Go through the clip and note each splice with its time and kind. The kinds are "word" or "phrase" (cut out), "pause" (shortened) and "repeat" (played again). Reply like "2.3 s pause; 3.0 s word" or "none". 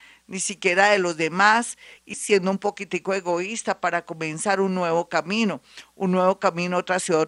2.1 s word